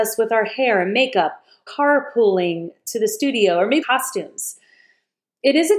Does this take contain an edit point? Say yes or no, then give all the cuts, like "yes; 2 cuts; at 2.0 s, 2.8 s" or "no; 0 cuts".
yes; 2 cuts; at 1.7 s, 3.8 s